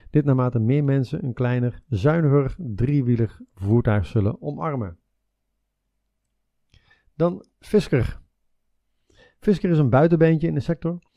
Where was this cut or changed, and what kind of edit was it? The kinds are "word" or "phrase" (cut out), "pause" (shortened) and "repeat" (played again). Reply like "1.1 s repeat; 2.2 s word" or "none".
7.5 s pause